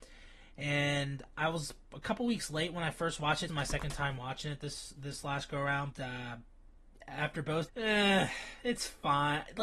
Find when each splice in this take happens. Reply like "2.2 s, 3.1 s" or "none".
3.5 s, 5.9 s, 7.7 s